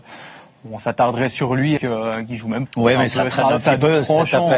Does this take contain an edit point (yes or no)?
yes